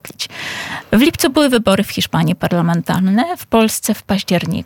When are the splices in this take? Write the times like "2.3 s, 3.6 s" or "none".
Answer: none